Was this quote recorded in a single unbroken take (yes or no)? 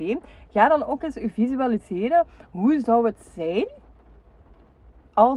yes